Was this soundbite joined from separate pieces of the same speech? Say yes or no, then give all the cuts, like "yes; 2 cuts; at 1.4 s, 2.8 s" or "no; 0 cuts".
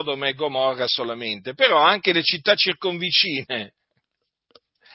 no; 0 cuts